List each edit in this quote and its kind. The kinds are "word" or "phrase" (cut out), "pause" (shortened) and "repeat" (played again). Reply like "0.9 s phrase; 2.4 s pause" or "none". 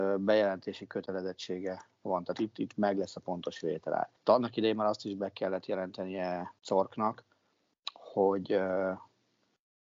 4.2 s pause; 6.6 s pause